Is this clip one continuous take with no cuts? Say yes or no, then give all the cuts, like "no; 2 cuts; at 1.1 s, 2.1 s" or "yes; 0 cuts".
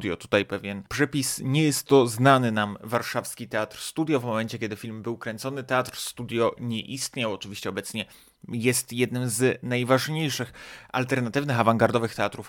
no; 1 cut; at 6.6 s